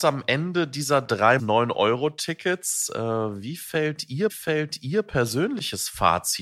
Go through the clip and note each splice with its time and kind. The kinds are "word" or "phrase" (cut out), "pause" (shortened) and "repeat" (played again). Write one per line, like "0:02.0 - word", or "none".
0:01.4 - phrase
0:04.3 - repeat

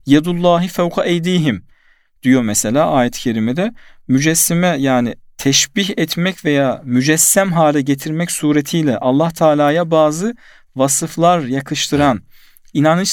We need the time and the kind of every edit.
none

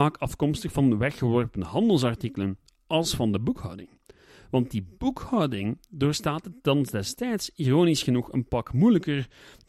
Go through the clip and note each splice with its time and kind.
none

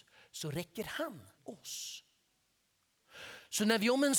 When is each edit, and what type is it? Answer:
0:01.4 - phrase

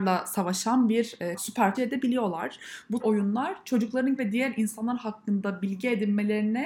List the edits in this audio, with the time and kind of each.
0:01.3 - word
0:01.7 - phrase
0:03.0 - phrase
0:04.2 - word

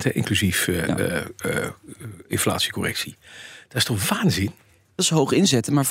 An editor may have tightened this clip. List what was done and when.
none

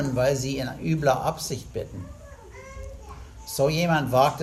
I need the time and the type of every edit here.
none

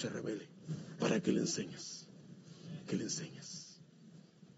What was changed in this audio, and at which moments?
0:02.9 - word

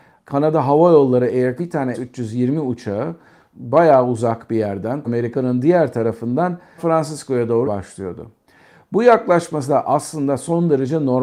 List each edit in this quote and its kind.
0:01.6 - word
0:01.9 - word
0:03.5 - word
0:05.1 - word
0:06.8 - word
0:07.6 - word

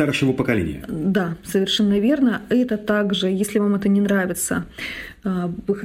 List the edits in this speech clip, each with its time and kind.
none

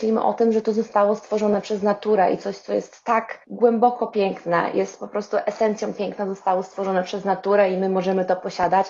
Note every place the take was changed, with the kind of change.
0:03.4 - pause

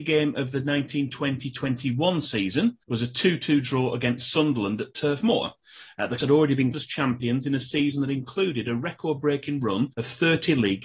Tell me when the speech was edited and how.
0:02.8 - pause
0:06.2 - word
0:06.7 - word
0:09.9 - pause

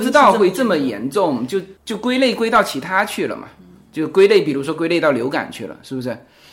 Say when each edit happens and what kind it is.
0:01.8 - pause

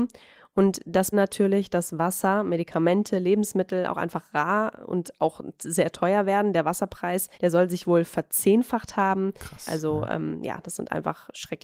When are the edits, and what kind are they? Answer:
0:01.1 - phrase
0:07.3 - pause

